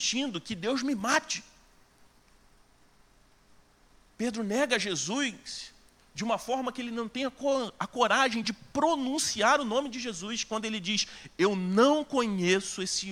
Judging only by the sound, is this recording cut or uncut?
uncut